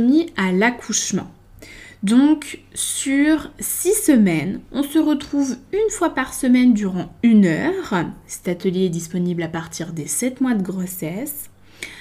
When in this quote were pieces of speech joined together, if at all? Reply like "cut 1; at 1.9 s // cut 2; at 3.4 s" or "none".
none

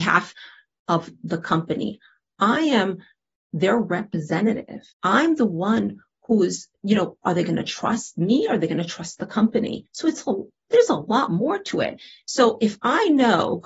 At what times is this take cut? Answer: cut 1; at 4.9 s // cut 2; at 9.9 s // cut 3; at 10.7 s

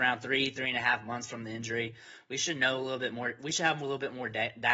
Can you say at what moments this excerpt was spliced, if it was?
none

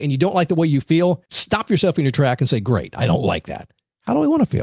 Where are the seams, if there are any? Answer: cut 1; at 1.3 s

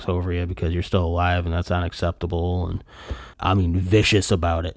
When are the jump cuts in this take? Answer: cut 1; at 3.3 s

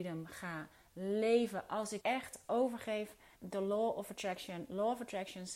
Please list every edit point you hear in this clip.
cut 1; at 2.0 s // cut 2; at 3.4 s

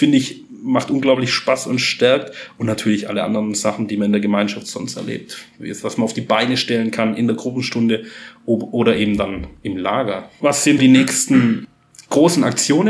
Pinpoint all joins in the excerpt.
cut 1; at 10.8 s

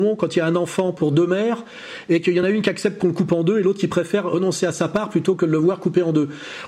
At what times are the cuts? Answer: none

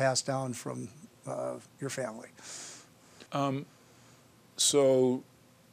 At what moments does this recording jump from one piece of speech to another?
cut 1; at 1.7 s // cut 2; at 3.3 s

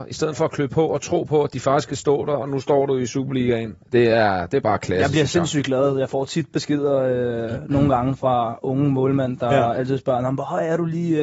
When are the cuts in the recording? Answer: cut 1; at 3.8 s

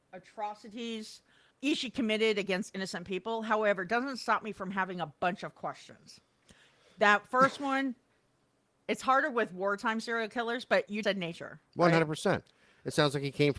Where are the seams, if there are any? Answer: cut 1; at 1.5 s // cut 2; at 11.0 s

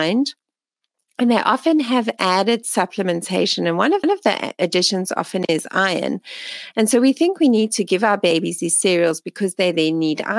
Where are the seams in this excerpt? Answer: cut 1; at 4.0 s

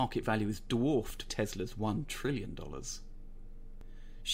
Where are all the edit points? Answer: cut 1; at 1.3 s

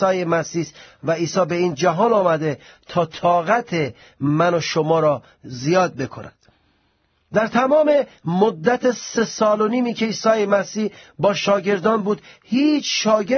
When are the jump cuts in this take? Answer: none

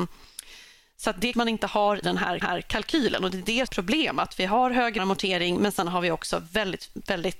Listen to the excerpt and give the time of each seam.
cut 1; at 1.3 s // cut 2; at 2.0 s // cut 3; at 2.4 s // cut 4; at 3.7 s // cut 5; at 5.0 s

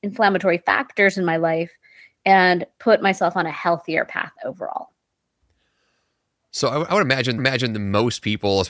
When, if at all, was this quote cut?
cut 1; at 7.4 s

